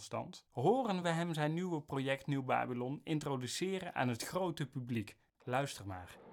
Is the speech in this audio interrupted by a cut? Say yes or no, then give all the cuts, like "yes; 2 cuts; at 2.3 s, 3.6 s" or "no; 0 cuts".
no; 0 cuts